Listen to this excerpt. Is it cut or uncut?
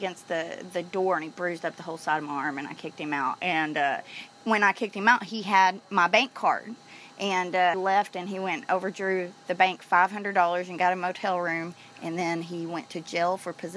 cut